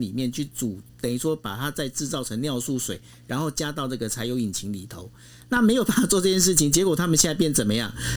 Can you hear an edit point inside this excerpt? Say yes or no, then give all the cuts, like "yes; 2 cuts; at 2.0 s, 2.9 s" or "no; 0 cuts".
no; 0 cuts